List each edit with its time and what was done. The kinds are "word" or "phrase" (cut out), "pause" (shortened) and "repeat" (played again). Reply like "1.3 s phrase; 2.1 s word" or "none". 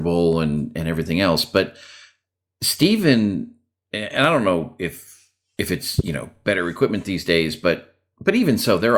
none